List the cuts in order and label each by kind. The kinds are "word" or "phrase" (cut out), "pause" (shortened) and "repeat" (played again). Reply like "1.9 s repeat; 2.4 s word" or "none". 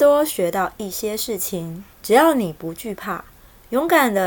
1.9 s pause